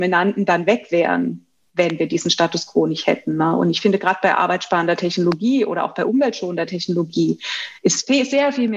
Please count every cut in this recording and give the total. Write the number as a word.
zero